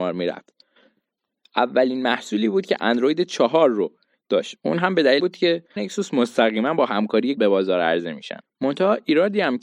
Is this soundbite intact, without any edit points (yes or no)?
no